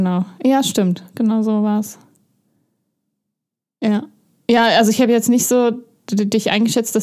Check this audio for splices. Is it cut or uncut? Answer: uncut